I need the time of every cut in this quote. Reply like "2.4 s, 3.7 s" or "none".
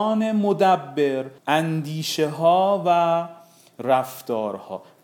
1.4 s